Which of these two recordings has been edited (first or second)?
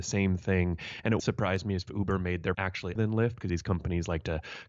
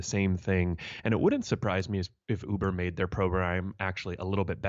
first